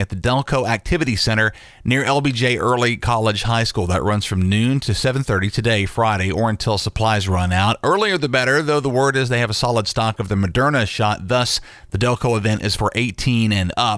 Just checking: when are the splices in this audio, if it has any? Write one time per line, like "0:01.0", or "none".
none